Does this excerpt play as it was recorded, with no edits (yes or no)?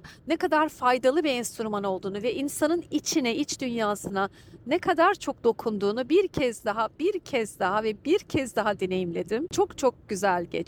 yes